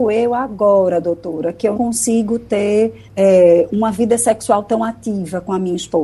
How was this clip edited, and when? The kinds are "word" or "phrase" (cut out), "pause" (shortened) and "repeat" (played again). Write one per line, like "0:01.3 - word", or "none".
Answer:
0:01.7 - word
0:03.1 - pause